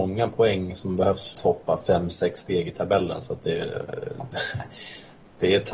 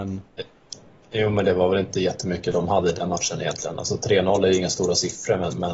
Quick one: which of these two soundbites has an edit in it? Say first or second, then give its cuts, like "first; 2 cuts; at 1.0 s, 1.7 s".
first; 1 cut; at 1.3 s